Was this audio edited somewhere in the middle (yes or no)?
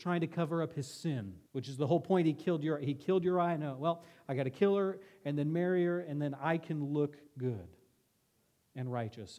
yes